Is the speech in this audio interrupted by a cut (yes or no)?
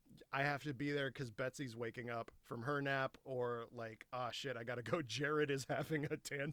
no